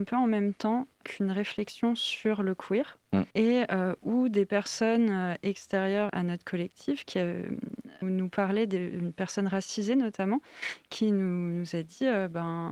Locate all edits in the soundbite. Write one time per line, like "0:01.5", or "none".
0:01.0
0:03.3
0:06.1
0:08.0